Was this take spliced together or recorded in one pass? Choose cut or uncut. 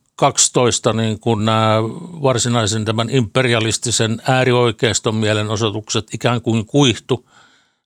uncut